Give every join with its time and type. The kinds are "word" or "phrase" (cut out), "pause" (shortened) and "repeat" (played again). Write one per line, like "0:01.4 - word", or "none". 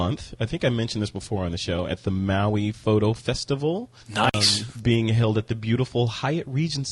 0:04.0 - pause
0:04.7 - word